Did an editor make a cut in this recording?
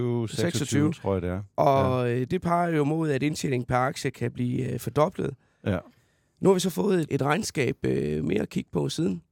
yes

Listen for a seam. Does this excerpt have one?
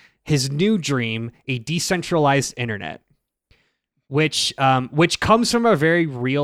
no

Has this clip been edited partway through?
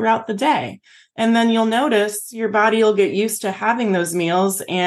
no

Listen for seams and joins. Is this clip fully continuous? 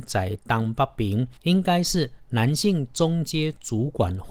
no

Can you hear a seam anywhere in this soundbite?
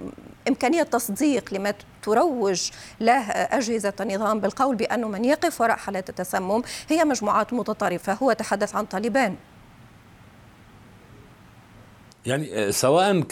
no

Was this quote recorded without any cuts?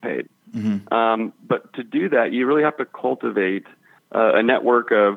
yes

